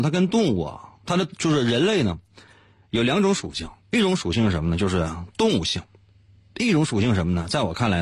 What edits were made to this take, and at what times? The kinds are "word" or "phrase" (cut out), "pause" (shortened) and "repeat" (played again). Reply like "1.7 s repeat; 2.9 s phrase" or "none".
3.8 s pause